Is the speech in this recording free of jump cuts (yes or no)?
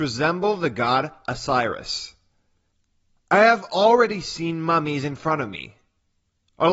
yes